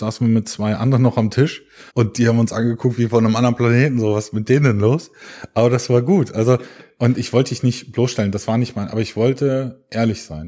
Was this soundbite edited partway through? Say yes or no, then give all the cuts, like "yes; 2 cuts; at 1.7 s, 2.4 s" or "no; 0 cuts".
yes; 1 cut; at 1.9 s